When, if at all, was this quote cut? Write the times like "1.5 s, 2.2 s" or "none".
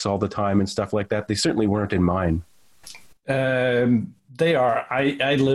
none